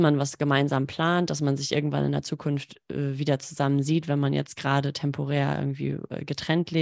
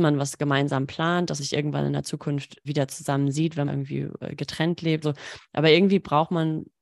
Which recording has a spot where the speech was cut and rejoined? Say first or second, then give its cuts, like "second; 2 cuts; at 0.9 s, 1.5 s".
second; 4 cuts; at 1.4 s, 2.6 s, 3.7 s, 5.0 s